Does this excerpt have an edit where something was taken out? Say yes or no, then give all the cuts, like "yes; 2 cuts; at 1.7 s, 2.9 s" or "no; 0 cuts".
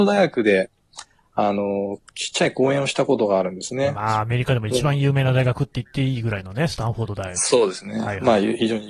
no; 0 cuts